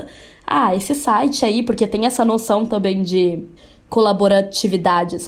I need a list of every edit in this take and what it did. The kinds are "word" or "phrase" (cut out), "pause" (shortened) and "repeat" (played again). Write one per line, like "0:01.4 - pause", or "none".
0:03.6 - pause